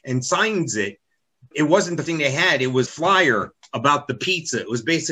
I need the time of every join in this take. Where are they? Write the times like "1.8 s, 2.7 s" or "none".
1.5 s, 2.1 s, 2.9 s